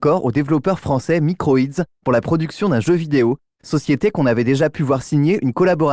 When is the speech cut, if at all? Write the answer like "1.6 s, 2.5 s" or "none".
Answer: none

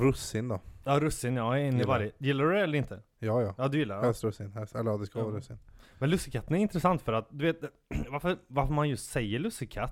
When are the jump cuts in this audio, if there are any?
none

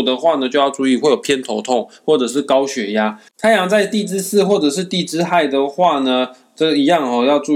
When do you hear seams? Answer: 3.3 s

